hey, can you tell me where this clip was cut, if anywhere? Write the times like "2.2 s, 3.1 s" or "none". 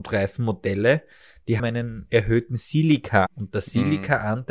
1.6 s, 3.3 s